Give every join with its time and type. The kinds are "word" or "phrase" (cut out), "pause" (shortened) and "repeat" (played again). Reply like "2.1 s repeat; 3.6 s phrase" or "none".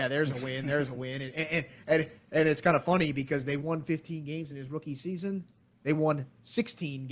none

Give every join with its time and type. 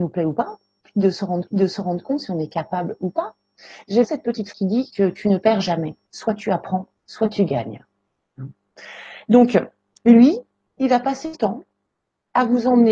1.5 s repeat; 4.0 s word; 4.5 s word; 6.1 s pause; 7.0 s pause; 11.3 s word

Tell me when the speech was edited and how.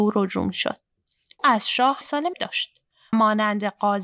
1.4 s word; 2.0 s word; 2.3 s word; 3.1 s word

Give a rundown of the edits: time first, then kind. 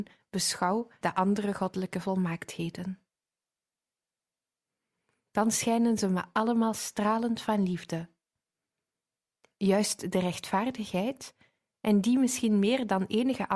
1.0 s phrase

